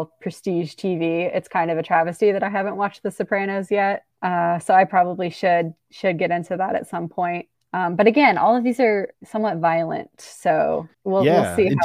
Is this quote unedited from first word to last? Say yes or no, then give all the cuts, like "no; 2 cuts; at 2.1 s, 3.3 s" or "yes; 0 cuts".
no; 4 cuts; at 4.1 s, 7.5 s, 9.1 s, 10.9 s